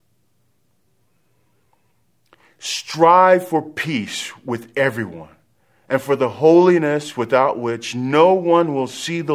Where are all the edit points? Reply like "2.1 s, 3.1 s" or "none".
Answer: none